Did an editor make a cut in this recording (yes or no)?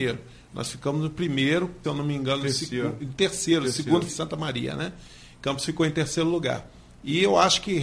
yes